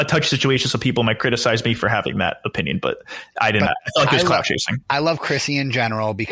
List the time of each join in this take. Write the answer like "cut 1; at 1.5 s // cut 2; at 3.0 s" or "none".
cut 1; at 3.7 s // cut 2; at 4.8 s